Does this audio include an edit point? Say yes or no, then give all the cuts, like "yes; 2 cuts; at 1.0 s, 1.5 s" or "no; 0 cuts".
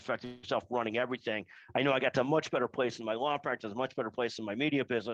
no; 0 cuts